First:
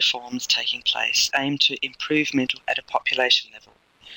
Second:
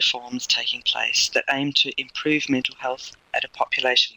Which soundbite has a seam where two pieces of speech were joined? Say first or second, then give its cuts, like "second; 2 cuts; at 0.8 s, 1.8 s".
first; 2 cuts; at 1.3 s, 2.6 s